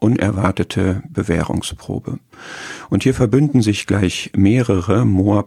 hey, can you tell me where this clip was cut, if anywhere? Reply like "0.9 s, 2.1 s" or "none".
none

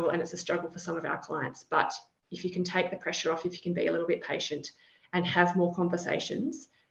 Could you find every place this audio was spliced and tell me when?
none

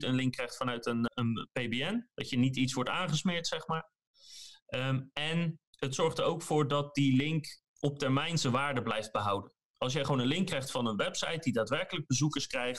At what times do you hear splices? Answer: 1.1 s, 2.1 s, 5.7 s

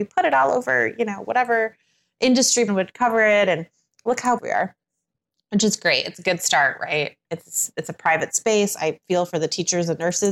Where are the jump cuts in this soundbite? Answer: 2.7 s, 4.4 s

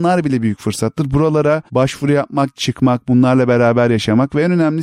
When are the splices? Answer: 1.7 s, 2.5 s

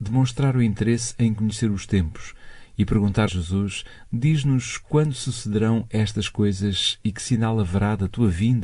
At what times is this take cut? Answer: 3.3 s

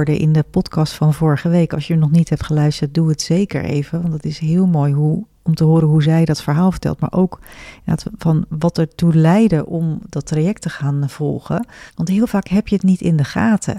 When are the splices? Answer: 11.9 s

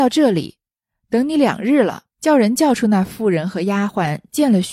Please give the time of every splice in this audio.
2.1 s

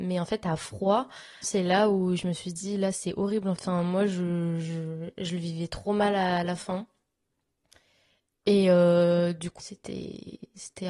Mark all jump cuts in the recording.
1.4 s, 3.6 s, 9.6 s

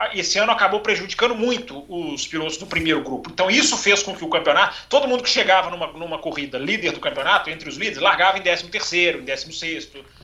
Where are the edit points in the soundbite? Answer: none

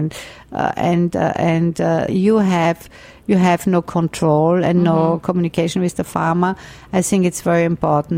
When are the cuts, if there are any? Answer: 2.1 s

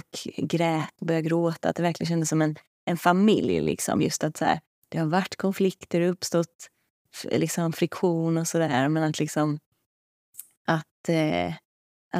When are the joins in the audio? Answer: none

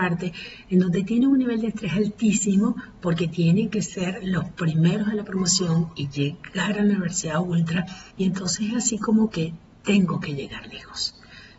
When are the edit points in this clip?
8.1 s

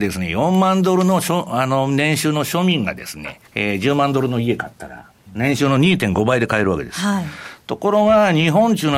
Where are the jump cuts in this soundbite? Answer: 3.5 s

